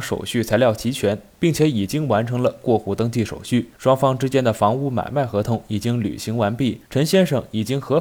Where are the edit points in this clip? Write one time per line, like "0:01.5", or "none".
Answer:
0:03.7
0:06.9